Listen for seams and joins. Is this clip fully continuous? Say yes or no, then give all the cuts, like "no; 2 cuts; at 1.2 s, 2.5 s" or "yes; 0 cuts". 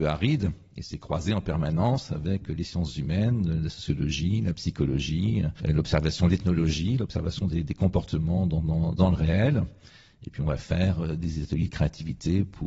yes; 0 cuts